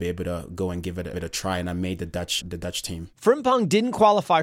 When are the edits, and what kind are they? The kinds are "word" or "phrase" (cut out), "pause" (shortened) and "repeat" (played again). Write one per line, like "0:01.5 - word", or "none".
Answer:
0:01.1 - word
0:02.4 - word
0:03.1 - pause